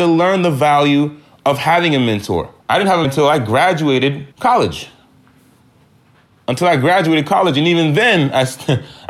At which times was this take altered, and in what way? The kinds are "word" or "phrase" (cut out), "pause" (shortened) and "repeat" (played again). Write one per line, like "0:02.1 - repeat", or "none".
0:02.6 - pause
0:03.0 - word
0:04.3 - pause